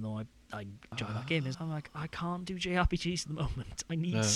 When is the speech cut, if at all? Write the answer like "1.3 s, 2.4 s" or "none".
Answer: 0.9 s, 1.5 s